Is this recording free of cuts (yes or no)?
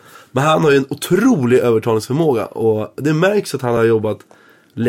yes